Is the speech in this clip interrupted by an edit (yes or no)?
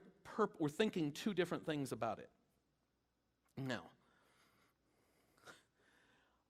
no